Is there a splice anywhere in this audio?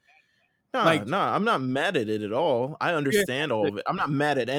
no; 0 cuts

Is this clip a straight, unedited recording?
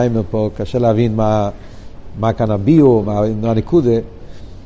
yes; 0 cuts

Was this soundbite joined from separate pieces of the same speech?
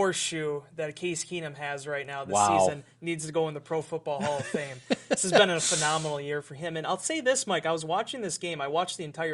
no; 0 cuts

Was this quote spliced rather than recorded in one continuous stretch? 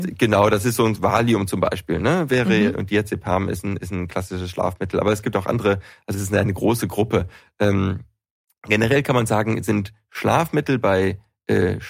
yes; 2 cuts; at 0.9 s, 6.1 s

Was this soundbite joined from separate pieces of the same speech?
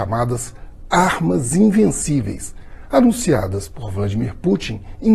no; 0 cuts

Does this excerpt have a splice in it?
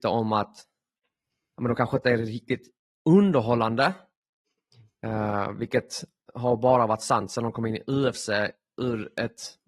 no; 0 cuts

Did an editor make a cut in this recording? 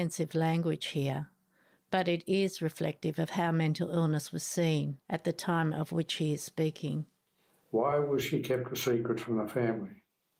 no; 0 cuts

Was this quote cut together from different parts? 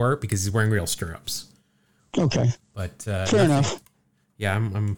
no; 0 cuts

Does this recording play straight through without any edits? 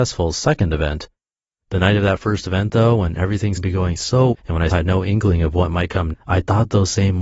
no; 4 cuts; at 3.6 s, 4.3 s, 4.7 s, 6.1 s

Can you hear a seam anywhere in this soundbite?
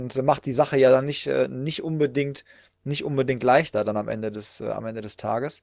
no; 0 cuts

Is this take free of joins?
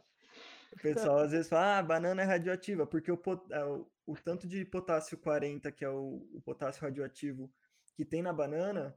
yes; 0 cuts

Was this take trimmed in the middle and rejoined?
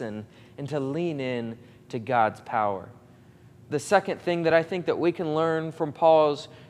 no; 0 cuts

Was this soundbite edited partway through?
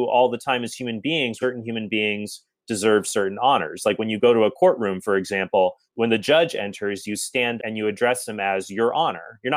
yes; 3 cuts; at 1.4 s, 5.9 s, 7.6 s

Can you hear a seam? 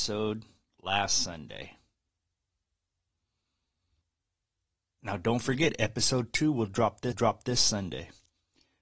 yes; 1 cut; at 7.1 s

